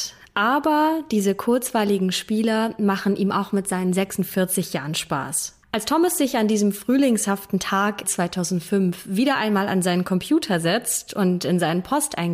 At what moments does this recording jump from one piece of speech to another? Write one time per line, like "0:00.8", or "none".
0:05.6
0:08.0